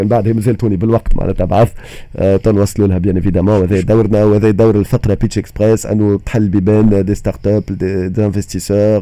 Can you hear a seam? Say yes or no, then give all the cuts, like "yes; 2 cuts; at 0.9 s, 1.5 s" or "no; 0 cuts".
no; 0 cuts